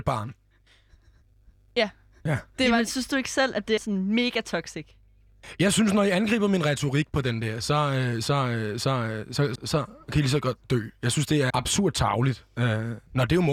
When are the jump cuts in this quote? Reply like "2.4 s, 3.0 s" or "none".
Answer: 3.8 s, 9.6 s, 11.5 s